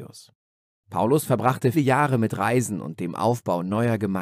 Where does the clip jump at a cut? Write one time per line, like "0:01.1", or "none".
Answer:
0:01.7